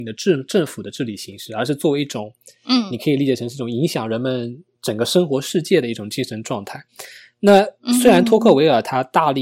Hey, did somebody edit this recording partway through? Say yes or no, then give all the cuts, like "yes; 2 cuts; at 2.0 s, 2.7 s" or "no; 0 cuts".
no; 0 cuts